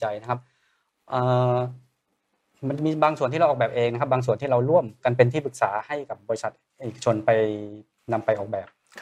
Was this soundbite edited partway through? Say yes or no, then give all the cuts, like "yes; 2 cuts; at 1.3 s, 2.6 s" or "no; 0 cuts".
no; 0 cuts